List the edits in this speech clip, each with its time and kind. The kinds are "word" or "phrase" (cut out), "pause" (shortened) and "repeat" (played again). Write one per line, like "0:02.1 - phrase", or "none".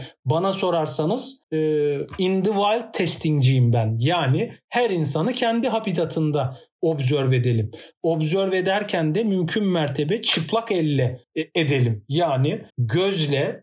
0:01.4 - pause
0:11.2 - pause
0:12.7 - pause